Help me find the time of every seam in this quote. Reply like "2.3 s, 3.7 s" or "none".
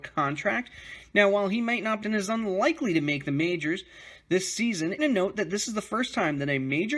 2.0 s, 5.0 s